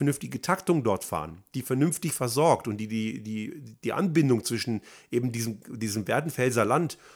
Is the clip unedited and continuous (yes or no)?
yes